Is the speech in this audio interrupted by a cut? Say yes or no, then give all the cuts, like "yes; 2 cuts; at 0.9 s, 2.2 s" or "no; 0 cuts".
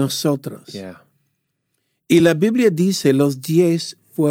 no; 0 cuts